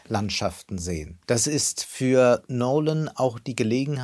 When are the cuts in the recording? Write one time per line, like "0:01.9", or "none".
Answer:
0:01.2